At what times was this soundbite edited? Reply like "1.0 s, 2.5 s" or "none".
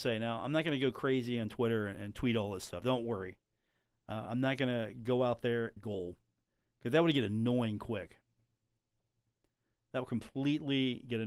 5.8 s